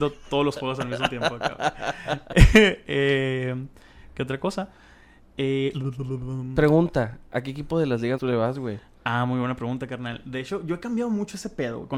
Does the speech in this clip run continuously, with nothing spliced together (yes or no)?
no